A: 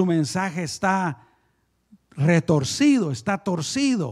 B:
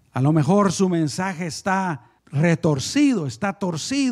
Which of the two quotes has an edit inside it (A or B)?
B